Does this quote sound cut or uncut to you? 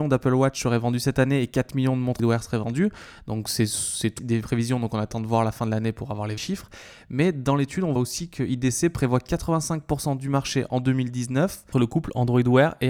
cut